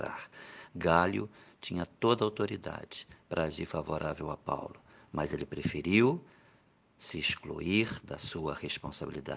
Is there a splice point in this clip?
no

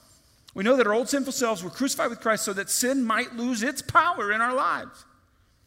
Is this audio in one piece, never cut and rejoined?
yes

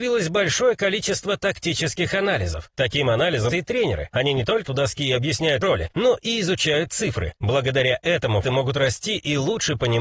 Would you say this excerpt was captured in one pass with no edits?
no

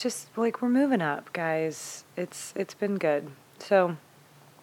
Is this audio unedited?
yes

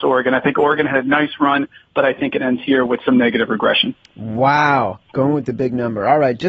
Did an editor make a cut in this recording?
no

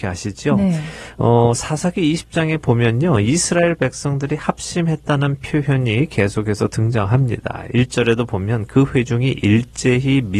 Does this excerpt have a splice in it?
no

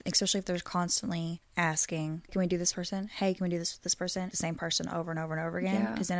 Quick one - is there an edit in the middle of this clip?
yes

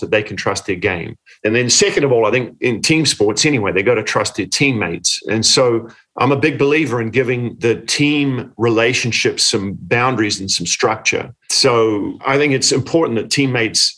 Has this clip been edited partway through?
no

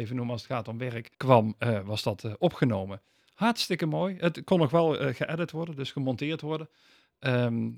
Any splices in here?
yes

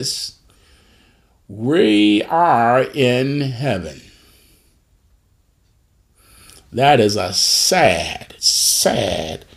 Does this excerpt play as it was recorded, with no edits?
no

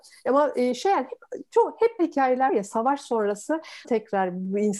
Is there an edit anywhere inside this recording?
yes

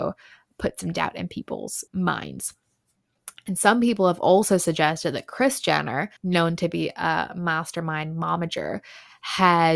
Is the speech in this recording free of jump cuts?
no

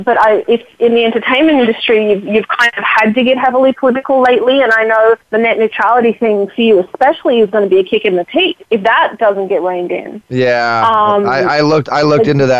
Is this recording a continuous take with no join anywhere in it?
no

